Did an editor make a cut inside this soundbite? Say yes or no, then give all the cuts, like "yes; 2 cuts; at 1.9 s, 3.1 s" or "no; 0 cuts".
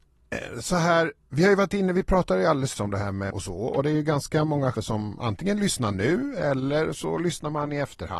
yes; 4 cuts; at 1.2 s, 2.8 s, 3.3 s, 4.7 s